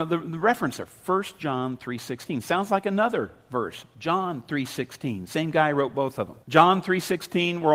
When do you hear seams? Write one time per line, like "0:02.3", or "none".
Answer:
0:06.4